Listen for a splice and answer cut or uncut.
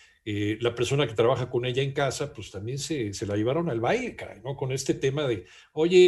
uncut